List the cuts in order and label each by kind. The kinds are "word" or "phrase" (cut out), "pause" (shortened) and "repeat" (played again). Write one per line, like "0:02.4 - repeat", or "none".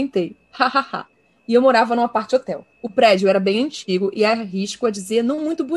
0:01.1 - pause
0:02.7 - pause